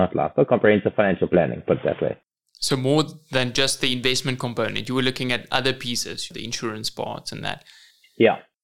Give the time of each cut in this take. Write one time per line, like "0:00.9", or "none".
0:06.3